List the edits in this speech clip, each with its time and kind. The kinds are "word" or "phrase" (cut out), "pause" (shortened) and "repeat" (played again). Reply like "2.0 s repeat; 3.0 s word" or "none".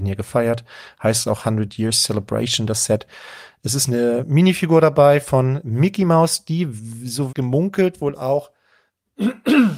7.3 s word